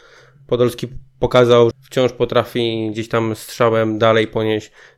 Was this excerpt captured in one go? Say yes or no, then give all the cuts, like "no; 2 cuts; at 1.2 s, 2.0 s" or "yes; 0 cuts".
no; 1 cut; at 1.7 s